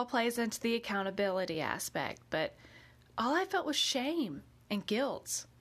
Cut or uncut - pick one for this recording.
uncut